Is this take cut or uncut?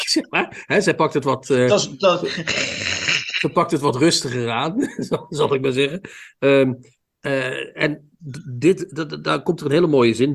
uncut